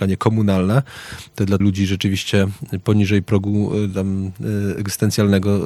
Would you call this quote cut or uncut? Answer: cut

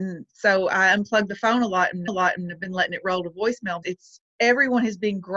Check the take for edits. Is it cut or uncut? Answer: cut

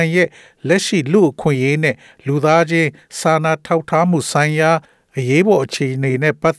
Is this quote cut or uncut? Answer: uncut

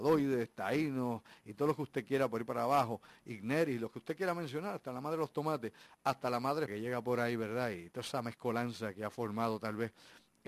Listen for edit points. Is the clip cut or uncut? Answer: cut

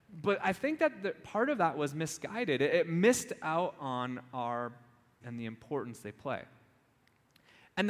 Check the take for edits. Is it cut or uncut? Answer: cut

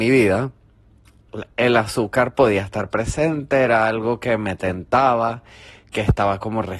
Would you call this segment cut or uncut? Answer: uncut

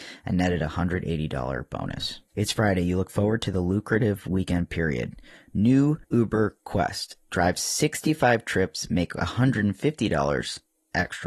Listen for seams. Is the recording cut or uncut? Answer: cut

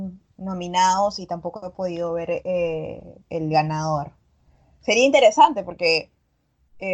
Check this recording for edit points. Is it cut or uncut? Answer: cut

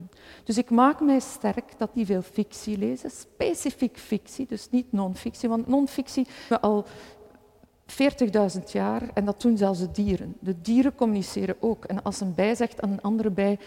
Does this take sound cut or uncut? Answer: cut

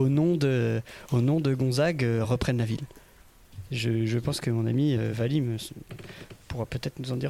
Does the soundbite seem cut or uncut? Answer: uncut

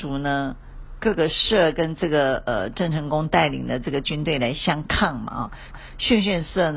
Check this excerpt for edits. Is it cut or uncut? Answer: cut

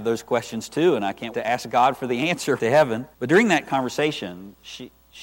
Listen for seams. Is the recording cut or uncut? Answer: cut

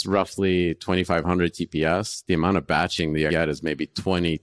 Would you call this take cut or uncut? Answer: cut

